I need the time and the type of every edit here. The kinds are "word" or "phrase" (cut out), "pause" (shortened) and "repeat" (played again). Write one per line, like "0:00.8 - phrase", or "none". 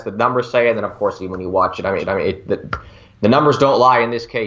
0:02.0 - repeat